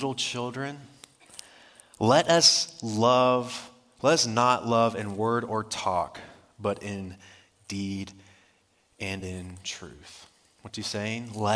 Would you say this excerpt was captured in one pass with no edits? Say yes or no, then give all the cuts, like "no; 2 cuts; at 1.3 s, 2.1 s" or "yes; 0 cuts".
yes; 0 cuts